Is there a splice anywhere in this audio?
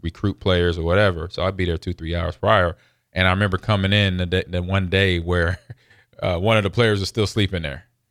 no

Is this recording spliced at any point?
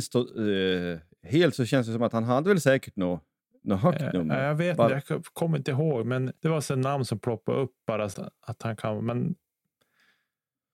yes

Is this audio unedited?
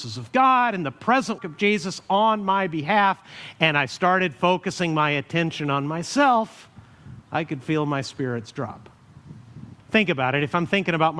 no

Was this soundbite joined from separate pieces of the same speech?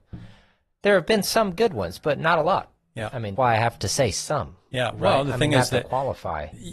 yes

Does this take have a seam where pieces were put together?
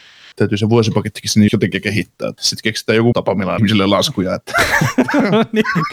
yes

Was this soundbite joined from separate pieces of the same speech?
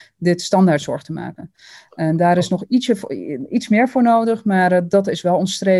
no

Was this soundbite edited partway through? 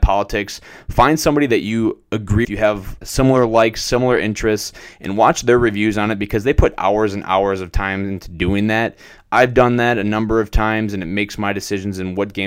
yes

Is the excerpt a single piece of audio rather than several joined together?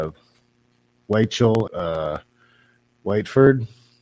no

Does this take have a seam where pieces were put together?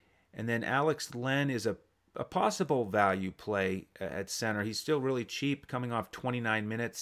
no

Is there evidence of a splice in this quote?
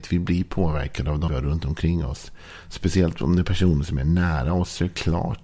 yes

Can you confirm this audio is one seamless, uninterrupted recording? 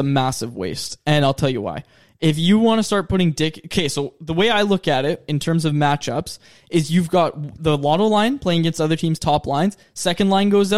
yes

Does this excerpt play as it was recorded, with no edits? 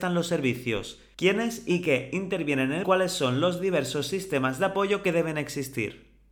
no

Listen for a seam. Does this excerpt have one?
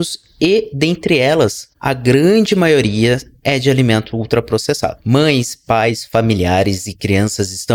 no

